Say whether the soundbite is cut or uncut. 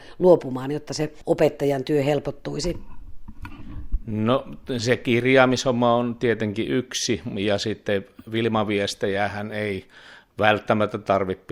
uncut